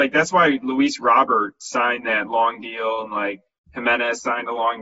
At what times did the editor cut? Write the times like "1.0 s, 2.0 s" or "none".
none